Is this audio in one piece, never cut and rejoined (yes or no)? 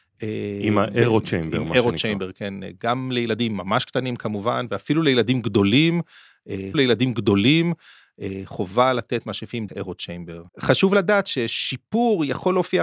no